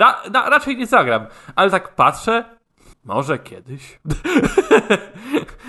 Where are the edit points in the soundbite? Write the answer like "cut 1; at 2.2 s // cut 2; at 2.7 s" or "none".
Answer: cut 1; at 2.9 s

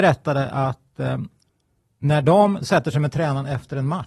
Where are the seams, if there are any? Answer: none

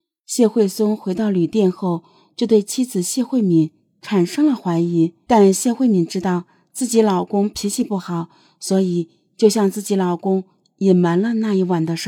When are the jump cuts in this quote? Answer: cut 1; at 5.2 s

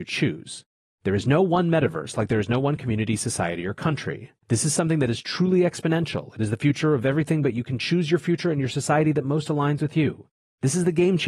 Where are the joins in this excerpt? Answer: cut 1; at 4.4 s

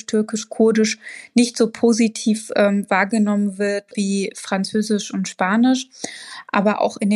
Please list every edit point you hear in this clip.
none

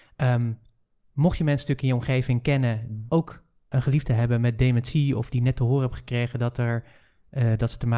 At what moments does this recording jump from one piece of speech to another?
cut 1; at 3.1 s

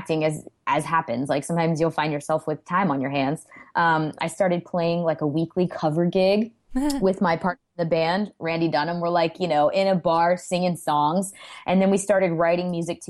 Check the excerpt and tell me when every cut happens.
cut 1; at 6.6 s

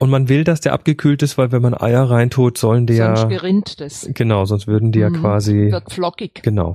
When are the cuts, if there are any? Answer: none

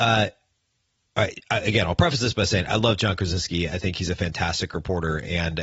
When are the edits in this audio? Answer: none

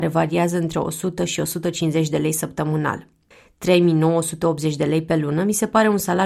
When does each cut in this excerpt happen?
none

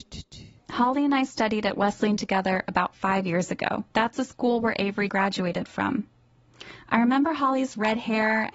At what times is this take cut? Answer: cut 1; at 3.9 s // cut 2; at 5.1 s

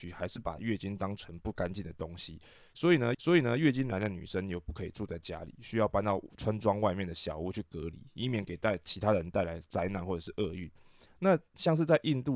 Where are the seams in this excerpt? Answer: cut 1; at 3.1 s

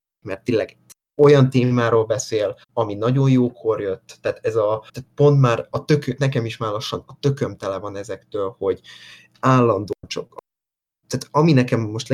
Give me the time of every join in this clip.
cut 1; at 2.6 s // cut 2; at 4.9 s

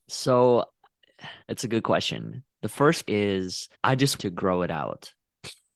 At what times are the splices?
cut 1; at 1.4 s // cut 2; at 3.0 s // cut 3; at 3.7 s // cut 4; at 4.2 s

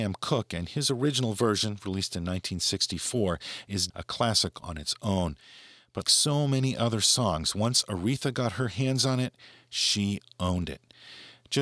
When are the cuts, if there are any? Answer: cut 1; at 3.9 s // cut 2; at 4.6 s // cut 3; at 6.0 s

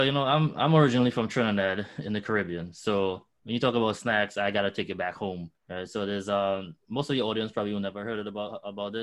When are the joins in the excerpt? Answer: cut 1; at 5.6 s

